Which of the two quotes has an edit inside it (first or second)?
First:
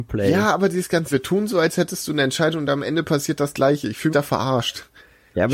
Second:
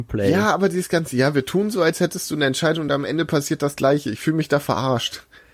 first